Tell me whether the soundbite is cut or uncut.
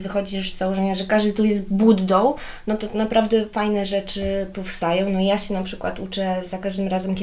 uncut